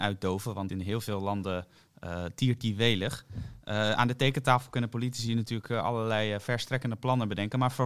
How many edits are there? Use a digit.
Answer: 0